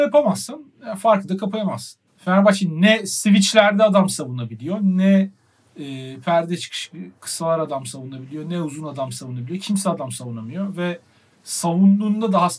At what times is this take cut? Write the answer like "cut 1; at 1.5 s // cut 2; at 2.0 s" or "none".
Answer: cut 1; at 2.1 s